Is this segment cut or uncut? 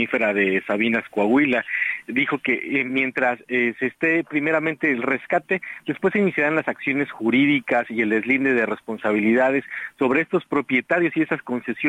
uncut